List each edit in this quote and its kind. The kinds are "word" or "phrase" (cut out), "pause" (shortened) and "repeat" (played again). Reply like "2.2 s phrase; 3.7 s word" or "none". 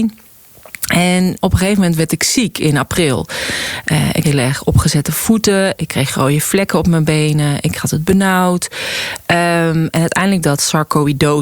1.4 s word; 4.2 s word; 10.4 s word